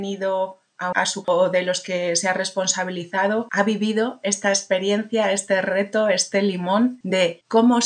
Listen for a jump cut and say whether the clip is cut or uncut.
cut